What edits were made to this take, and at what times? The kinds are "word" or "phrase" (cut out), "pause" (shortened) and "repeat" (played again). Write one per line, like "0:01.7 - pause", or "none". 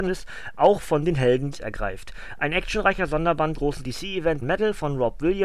0:01.5 - word
0:03.6 - word
0:04.4 - word